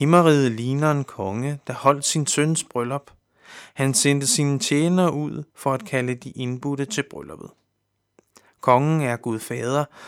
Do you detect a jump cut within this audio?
yes; 1 cut; at 5.5 s

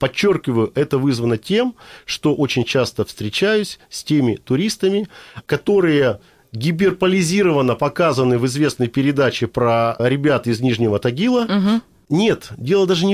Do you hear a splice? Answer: no; 0 cuts

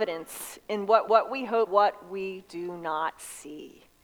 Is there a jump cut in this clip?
yes; 2 cuts; at 1.1 s, 1.7 s

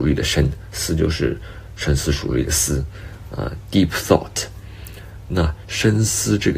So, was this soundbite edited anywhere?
no; 0 cuts

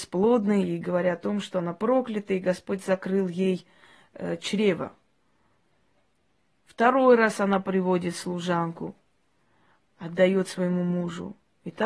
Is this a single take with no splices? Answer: yes; 0 cuts

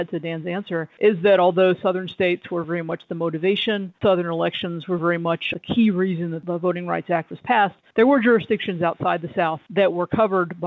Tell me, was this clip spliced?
no; 0 cuts

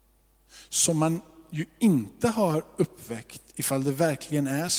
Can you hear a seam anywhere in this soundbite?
no; 0 cuts

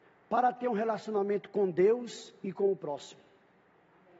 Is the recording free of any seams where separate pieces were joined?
yes; 0 cuts

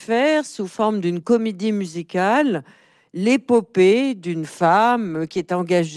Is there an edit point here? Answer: no; 0 cuts

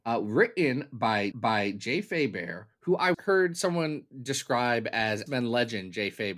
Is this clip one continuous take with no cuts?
no; 3 cuts; at 1.3 s, 3.1 s, 5.3 s

